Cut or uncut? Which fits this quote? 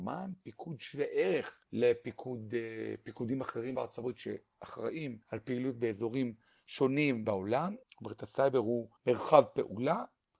cut